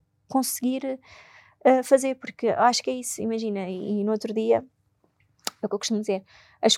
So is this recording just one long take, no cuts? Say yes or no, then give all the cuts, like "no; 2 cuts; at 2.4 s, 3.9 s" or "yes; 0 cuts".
yes; 0 cuts